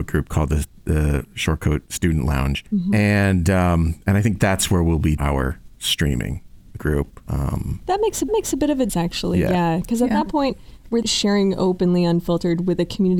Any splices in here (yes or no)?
yes